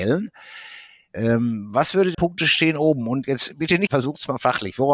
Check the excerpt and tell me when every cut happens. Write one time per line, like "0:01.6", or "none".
0:02.1
0:03.9